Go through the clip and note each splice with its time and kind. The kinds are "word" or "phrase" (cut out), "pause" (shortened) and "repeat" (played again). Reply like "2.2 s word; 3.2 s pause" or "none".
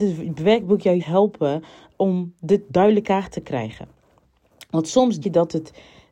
1.0 s word; 3.0 s word; 5.2 s word